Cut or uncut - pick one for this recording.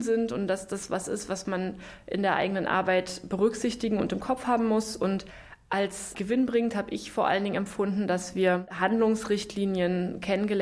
uncut